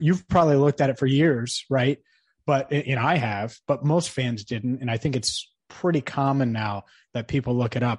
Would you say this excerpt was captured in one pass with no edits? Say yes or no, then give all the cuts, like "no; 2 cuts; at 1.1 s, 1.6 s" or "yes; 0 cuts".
yes; 0 cuts